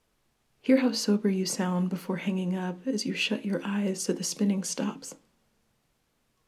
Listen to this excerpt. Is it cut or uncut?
uncut